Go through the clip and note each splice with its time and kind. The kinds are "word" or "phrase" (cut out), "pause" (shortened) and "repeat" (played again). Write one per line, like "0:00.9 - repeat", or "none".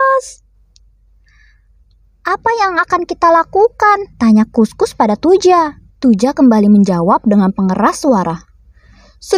0:04.1 - pause
0:05.9 - pause